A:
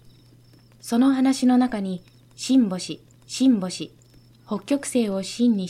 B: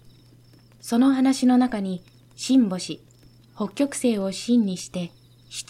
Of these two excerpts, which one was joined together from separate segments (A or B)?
A